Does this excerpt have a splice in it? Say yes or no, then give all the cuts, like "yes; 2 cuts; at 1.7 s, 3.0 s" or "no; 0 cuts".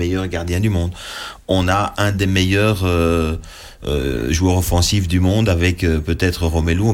no; 0 cuts